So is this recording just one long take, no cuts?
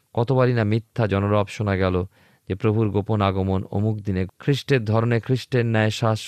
no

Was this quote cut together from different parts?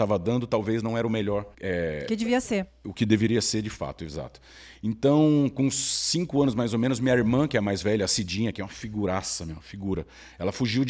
yes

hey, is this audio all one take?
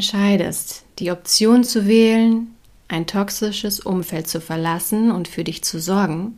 yes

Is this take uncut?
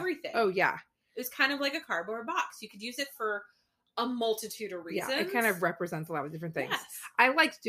yes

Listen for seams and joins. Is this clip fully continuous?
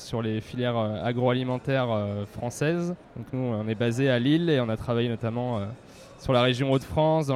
no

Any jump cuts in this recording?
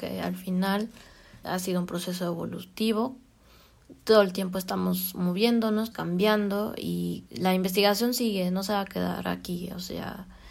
yes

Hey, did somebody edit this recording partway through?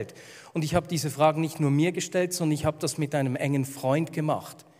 no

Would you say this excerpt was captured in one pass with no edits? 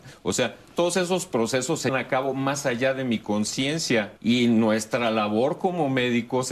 no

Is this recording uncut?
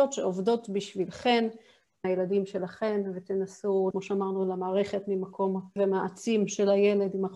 no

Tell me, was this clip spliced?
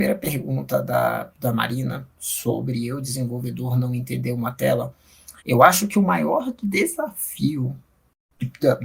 yes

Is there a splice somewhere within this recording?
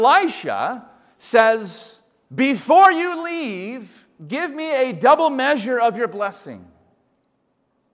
no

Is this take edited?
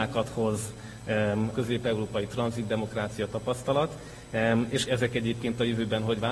yes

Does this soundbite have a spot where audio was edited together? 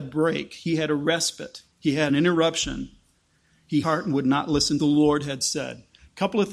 yes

